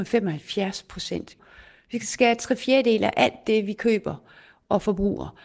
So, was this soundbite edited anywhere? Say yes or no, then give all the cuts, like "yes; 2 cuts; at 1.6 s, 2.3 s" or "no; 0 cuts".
no; 0 cuts